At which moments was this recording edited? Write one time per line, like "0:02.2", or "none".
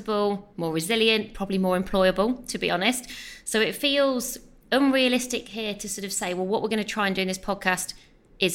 none